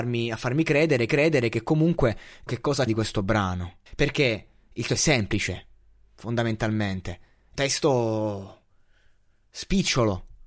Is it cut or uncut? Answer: cut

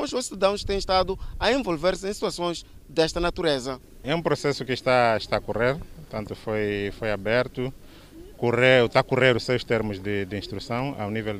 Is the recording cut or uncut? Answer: cut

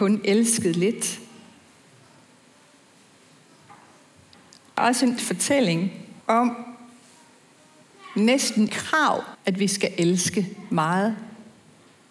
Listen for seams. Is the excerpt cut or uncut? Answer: cut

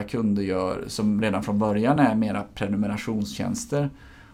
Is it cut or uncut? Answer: uncut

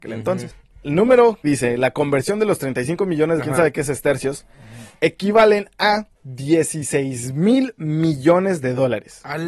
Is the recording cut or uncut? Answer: cut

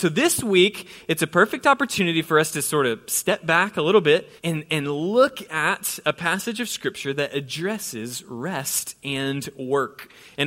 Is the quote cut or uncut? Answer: cut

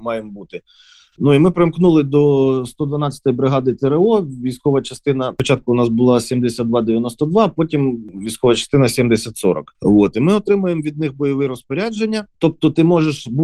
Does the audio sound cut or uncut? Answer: uncut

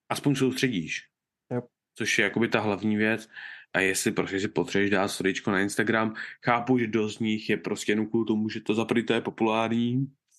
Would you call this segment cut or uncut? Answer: uncut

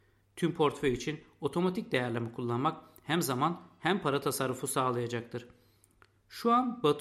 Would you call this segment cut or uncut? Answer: uncut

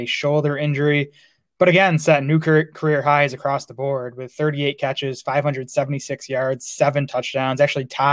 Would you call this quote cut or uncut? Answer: uncut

